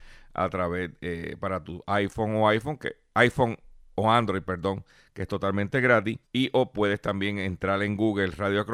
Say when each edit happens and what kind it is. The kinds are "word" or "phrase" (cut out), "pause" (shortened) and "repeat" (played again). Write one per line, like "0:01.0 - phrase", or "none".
0:06.2 - pause